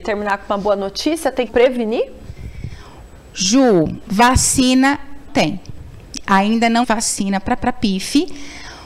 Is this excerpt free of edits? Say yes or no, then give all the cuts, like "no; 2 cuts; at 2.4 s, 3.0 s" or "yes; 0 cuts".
no; 4 cuts; at 1.5 s, 5.3 s, 6.8 s, 7.6 s